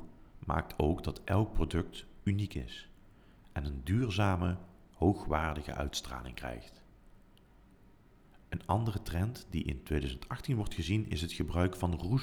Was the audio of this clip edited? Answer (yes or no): no